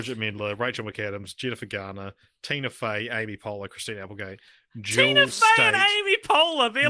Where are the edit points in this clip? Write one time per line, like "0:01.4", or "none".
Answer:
none